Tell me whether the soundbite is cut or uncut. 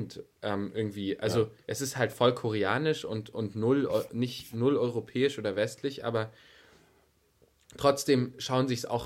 cut